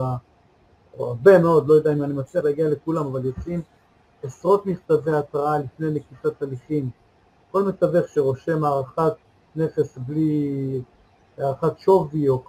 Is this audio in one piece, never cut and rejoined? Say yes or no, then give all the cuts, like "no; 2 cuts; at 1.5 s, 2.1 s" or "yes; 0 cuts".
yes; 0 cuts